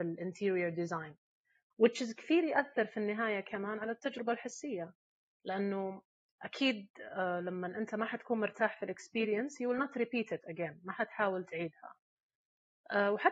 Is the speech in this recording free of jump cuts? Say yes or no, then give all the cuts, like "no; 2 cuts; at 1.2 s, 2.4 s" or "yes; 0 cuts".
yes; 0 cuts